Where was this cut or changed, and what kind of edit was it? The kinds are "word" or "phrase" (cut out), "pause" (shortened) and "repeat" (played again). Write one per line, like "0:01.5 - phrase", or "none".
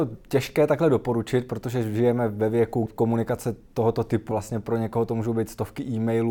0:02.9 - word
0:04.3 - phrase